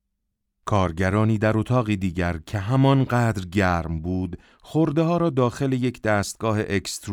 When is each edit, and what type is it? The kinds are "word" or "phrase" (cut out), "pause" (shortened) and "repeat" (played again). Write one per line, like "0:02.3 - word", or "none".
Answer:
none